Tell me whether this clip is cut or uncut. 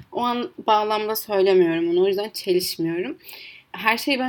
uncut